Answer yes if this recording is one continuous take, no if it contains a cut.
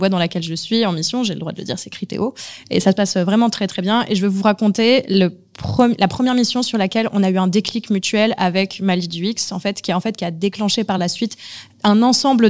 yes